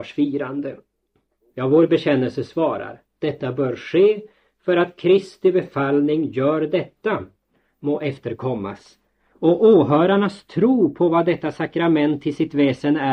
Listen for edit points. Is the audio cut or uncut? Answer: uncut